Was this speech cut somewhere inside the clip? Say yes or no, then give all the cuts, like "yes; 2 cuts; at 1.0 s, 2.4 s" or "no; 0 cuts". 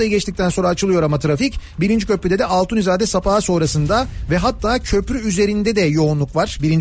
no; 0 cuts